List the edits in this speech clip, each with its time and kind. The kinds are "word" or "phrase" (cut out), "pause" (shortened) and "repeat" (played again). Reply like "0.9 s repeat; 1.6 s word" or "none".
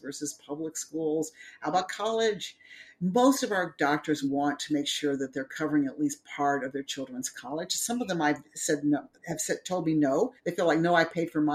9.1 s pause; 10.4 s pause